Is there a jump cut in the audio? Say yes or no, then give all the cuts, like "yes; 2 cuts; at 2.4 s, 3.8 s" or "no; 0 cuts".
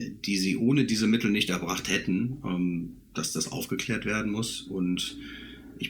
no; 0 cuts